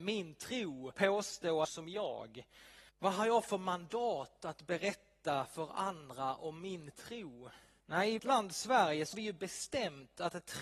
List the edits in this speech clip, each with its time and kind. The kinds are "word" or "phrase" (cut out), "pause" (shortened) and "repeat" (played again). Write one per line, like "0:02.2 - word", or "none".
0:00.9 - word
0:01.6 - phrase
0:02.9 - pause
0:07.8 - pause
0:08.2 - word
0:09.1 - word